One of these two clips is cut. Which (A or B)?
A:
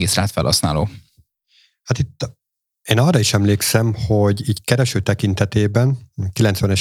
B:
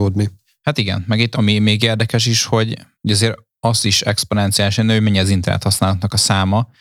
B